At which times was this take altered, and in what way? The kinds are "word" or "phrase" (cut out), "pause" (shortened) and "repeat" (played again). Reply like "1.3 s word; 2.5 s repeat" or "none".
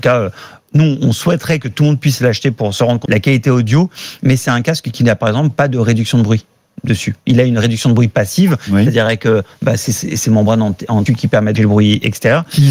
3.1 s word; 11.1 s word; 11.6 s word